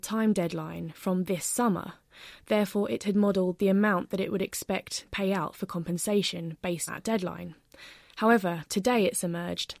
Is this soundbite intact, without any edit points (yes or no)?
no